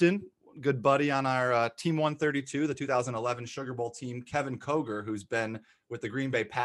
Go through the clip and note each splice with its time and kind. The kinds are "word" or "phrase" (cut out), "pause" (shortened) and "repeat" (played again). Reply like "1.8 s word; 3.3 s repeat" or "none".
none

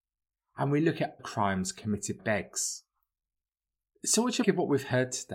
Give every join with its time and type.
1.2 s word; 2.2 s word; 4.4 s word

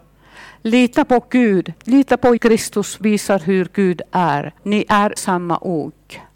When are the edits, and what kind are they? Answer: 1.8 s pause; 2.4 s word; 3.0 s word; 4.6 s pause; 5.2 s word

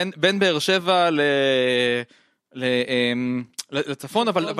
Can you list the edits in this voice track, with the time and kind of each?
none

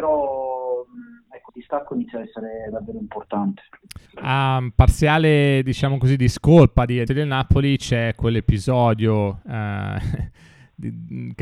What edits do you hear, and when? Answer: 1.5 s word; 4.1 s pause; 7.1 s phrase

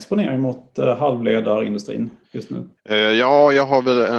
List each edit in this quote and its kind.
2.2 s pause; 2.8 s pause

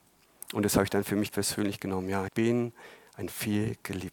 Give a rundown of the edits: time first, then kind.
1.3 s word; 2.3 s word

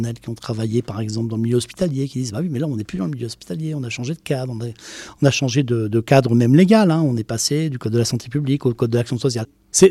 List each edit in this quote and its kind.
none

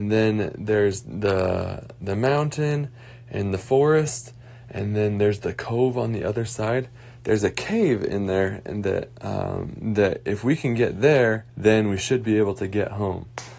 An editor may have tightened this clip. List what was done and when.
11.5 s pause

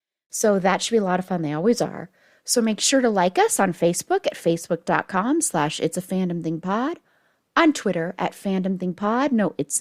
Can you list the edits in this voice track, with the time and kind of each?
none

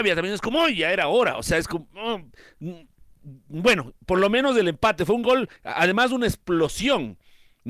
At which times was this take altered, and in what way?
5.6 s pause

